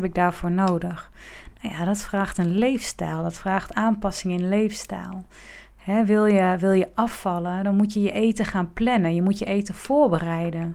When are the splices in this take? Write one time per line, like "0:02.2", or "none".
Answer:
none